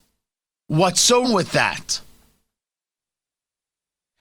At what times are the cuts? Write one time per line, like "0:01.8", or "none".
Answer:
0:01.2